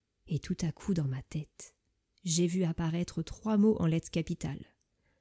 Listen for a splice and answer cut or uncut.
uncut